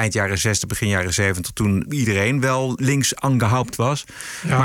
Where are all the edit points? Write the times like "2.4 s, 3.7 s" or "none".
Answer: 1.9 s, 2.8 s